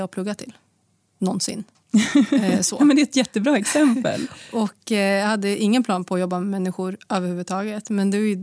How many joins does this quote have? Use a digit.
0